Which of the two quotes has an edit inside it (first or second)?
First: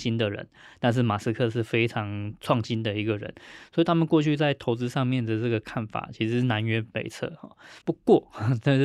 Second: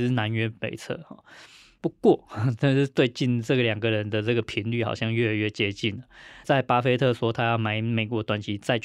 first